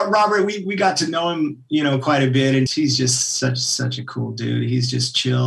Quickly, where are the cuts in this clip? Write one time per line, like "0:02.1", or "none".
0:02.7